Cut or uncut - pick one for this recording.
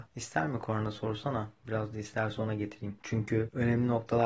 uncut